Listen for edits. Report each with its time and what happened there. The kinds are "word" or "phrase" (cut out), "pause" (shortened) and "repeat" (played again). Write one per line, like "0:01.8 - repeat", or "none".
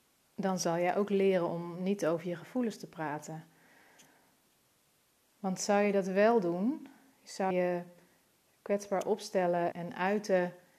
0:07.5 - word
0:09.7 - word